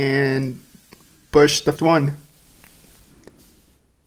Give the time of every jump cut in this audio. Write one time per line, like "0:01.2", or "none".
0:01.8